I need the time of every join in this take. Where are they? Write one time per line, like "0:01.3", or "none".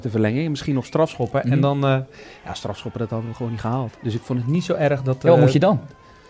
0:04.0